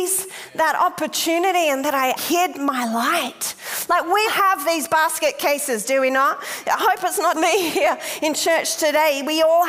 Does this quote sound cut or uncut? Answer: cut